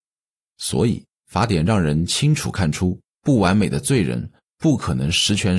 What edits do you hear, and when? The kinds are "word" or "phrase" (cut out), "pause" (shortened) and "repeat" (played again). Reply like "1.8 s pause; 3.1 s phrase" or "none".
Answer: 1.2 s pause; 3.1 s pause

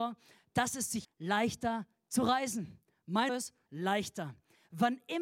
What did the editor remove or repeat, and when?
1.0 s word; 3.3 s word; 3.7 s word

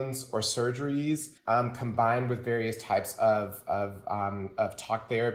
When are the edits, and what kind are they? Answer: 1.4 s pause

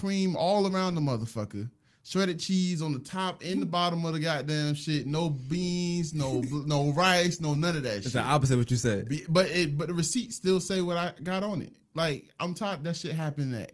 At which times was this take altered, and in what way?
none

